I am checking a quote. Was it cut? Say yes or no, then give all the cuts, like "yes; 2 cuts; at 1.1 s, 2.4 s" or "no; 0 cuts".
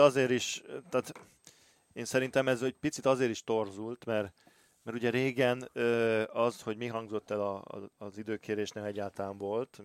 no; 0 cuts